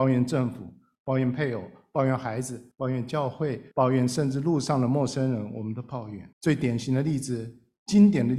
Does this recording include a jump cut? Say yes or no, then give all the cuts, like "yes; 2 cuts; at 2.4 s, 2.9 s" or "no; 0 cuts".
yes; 3 cuts; at 2.7 s, 3.7 s, 6.3 s